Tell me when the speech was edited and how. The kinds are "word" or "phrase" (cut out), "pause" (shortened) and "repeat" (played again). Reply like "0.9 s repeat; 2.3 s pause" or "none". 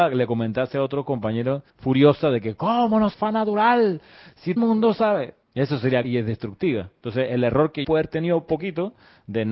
1.7 s pause; 3.1 s phrase; 4.6 s phrase; 5.4 s pause; 6.0 s word; 7.8 s word